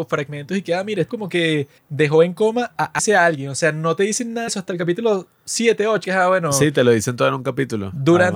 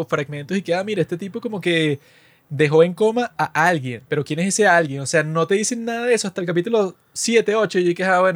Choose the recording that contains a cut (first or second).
first